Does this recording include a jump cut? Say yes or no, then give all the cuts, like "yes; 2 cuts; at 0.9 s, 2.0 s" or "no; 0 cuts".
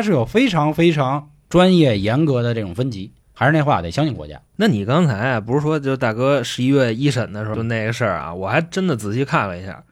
yes; 3 cuts; at 3.2 s, 4.5 s, 7.5 s